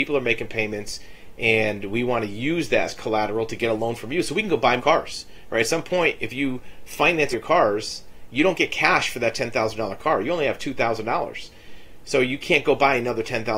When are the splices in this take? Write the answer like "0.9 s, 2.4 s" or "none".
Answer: 4.8 s, 7.3 s